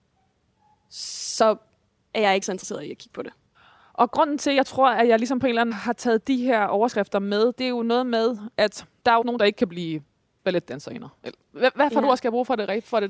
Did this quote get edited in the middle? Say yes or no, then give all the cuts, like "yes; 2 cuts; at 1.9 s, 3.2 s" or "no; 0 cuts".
yes; 4 cuts; at 2.4 s, 5.7 s, 7.5 s, 9.2 s